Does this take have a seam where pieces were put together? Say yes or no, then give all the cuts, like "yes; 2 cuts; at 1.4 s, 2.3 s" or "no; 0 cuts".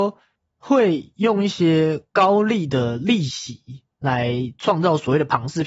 yes; 1 cut; at 3.9 s